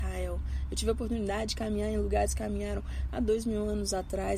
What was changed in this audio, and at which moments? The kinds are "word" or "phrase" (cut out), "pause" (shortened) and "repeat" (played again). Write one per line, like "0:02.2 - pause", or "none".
0:02.3 - phrase